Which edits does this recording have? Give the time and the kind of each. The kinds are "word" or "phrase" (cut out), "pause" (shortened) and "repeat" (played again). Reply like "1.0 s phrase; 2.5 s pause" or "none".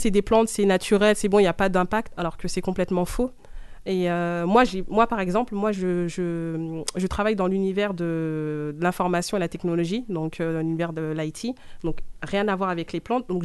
none